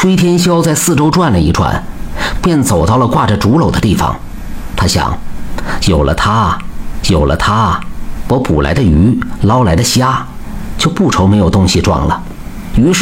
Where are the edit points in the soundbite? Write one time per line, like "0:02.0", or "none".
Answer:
0:07.0